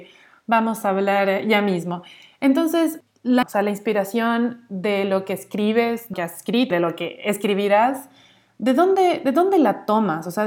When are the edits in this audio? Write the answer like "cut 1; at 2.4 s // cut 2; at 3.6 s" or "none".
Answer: cut 1; at 3.4 s // cut 2; at 6.1 s // cut 3; at 6.7 s